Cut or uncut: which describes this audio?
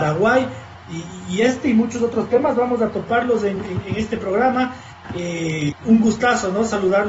uncut